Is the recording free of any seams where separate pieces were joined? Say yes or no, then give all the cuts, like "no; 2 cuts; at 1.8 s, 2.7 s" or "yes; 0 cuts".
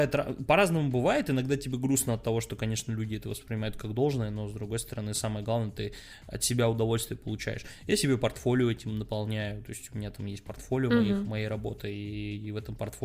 yes; 0 cuts